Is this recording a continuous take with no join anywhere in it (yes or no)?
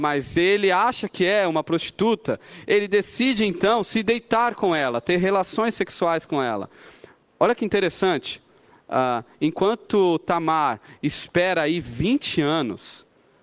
yes